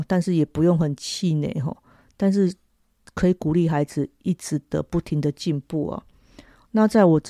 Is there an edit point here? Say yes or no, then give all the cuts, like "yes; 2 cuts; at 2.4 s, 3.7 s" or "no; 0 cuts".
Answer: no; 0 cuts